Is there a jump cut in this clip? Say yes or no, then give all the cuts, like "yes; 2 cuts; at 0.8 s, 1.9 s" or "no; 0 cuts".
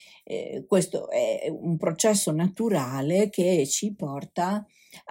no; 0 cuts